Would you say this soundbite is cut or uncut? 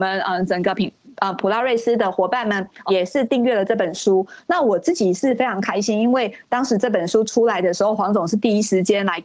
cut